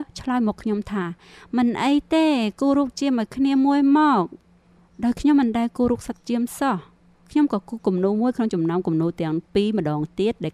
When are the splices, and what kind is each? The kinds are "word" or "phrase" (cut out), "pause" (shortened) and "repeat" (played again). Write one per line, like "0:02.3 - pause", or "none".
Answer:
none